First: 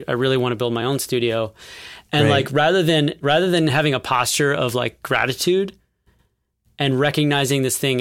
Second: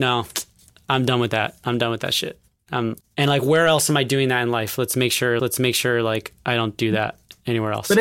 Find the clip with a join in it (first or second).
second